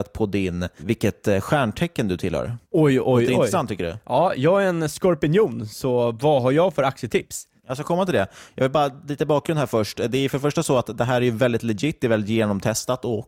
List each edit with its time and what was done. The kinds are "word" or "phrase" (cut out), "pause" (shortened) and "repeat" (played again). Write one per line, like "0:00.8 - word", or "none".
none

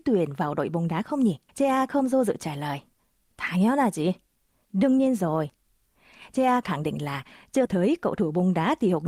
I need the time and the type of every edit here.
0:01.5 - pause
0:06.6 - word
0:07.7 - word

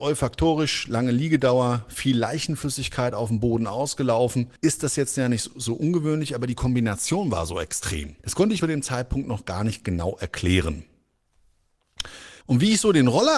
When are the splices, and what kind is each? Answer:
0:04.6 - pause
0:08.2 - pause
0:08.6 - phrase
0:12.4 - pause

